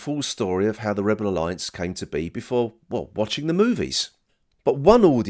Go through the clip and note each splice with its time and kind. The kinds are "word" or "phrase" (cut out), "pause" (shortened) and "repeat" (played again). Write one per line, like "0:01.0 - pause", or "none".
none